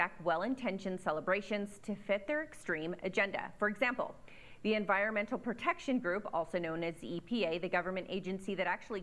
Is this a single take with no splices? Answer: yes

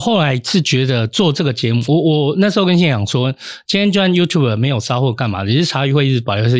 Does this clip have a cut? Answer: no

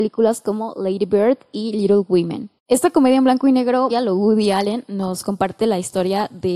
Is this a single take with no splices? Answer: no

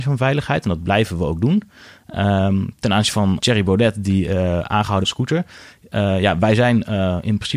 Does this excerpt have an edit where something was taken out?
yes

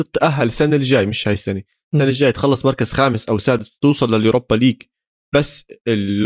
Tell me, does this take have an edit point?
no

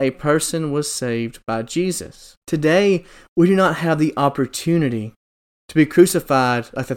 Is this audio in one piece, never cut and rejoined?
no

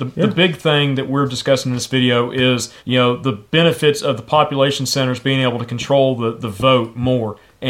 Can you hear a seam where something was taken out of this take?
yes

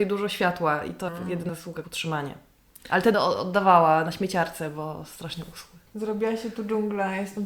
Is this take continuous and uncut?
no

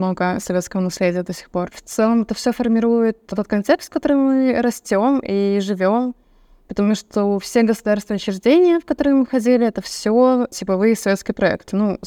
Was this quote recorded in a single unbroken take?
yes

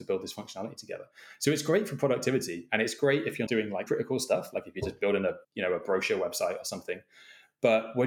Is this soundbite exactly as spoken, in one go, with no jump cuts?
no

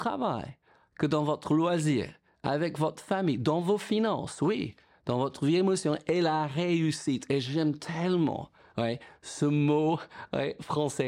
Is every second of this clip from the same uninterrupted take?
yes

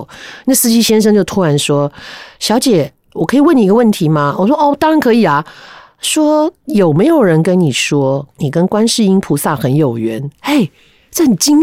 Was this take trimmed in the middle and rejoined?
yes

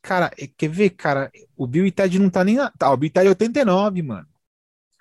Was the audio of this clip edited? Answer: no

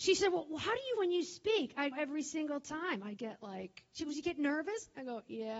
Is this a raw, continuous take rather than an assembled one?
no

